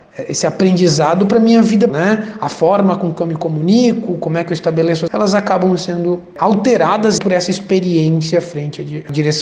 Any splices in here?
yes; 3 cuts; at 1.9 s, 5.1 s, 7.2 s

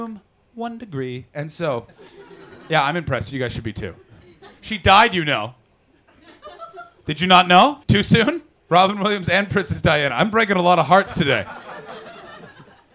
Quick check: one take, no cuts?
no; 2 cuts; at 7.8 s, 8.6 s

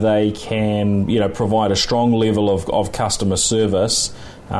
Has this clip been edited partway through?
no; 0 cuts

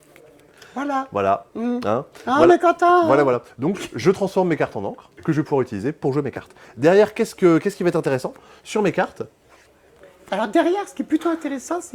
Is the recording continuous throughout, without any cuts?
yes; 0 cuts

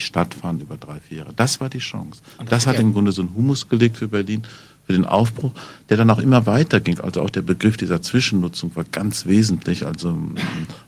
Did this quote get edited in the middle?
no; 0 cuts

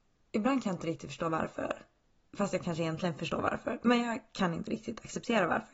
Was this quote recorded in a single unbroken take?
yes; 0 cuts

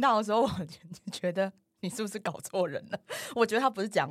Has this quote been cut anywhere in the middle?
no; 0 cuts

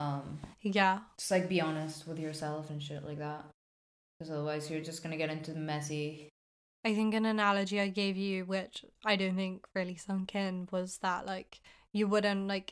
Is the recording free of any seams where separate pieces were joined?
yes; 0 cuts

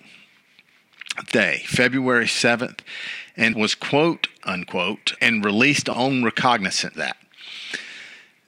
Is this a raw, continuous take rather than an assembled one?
no; 6 cuts; at 1.3 s, 3.5 s, 4.4 s, 5.2 s, 5.9 s, 7.0 s

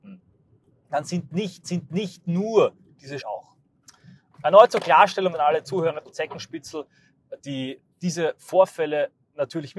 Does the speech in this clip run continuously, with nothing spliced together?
no; 5 cuts; at 1.6 s, 3.2 s, 5.3 s, 6.1 s, 7.9 s

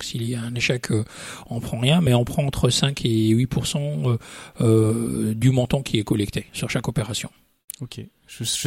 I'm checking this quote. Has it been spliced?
no; 0 cuts

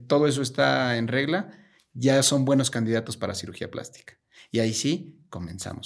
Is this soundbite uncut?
yes; 0 cuts

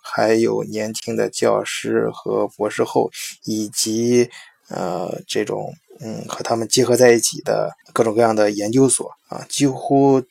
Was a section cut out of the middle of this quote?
yes; 2 cuts; at 7.8 s, 9.2 s

